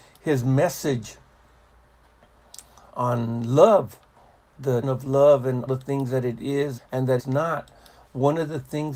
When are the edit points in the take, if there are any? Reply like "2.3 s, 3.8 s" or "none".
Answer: 2.9 s, 4.8 s, 5.7 s, 6.8 s, 7.2 s